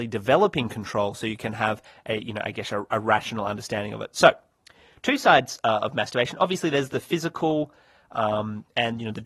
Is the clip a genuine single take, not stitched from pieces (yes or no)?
yes